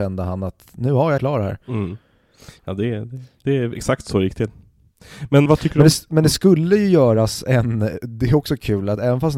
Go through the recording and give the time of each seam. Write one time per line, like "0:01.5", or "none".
0:01.2
0:05.5